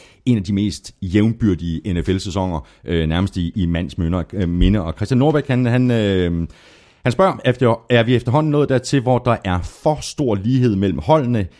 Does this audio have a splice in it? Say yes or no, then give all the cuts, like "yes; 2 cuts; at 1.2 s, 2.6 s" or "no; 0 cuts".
no; 0 cuts